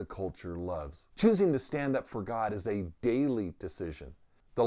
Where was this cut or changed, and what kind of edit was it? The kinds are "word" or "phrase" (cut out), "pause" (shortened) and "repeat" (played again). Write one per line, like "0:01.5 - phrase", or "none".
0:01.1 - pause